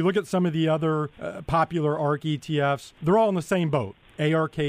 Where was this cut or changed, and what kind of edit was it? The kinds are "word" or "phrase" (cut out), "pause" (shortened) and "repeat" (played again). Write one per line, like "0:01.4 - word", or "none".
0:01.1 - pause
0:03.0 - pause